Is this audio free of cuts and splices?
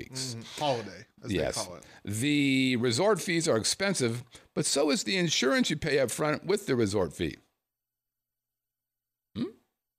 yes; 0 cuts

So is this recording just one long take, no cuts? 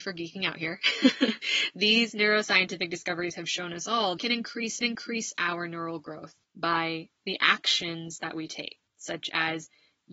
no; 4 cuts; at 4.2 s, 4.8 s, 6.4 s, 8.9 s

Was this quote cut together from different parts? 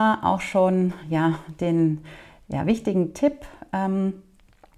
no; 0 cuts

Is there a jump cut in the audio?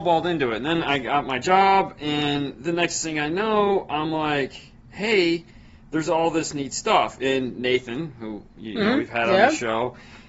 no; 0 cuts

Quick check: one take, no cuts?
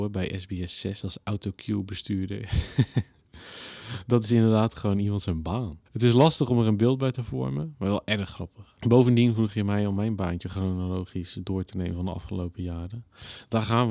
no; 2 cuts; at 5.9 s, 8.8 s

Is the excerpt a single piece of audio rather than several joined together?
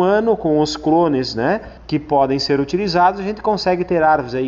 no; 1 cut; at 1.8 s

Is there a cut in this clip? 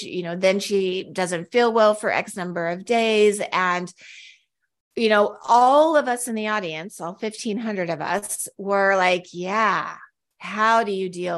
no; 0 cuts

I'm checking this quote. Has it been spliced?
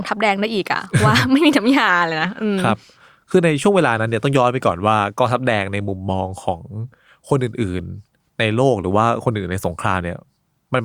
no; 0 cuts

